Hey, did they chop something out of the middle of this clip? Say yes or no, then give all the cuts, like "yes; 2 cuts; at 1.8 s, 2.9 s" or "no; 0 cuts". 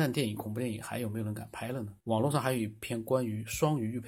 yes; 1 cut; at 2.0 s